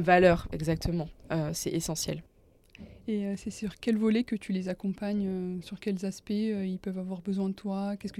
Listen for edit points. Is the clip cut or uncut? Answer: uncut